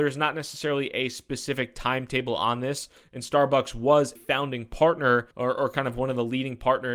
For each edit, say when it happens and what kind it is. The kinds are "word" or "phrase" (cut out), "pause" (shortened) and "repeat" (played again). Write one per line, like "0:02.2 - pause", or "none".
0:04.2 - word
0:05.3 - pause